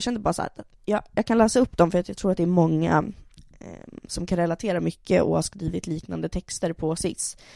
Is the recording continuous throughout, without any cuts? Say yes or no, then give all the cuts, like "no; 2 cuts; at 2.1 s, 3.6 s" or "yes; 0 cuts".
yes; 0 cuts